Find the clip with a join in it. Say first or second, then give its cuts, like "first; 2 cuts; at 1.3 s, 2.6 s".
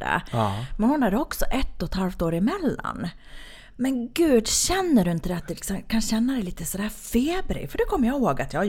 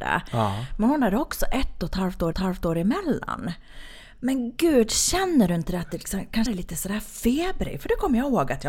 second; 2 cuts; at 2.3 s, 6.5 s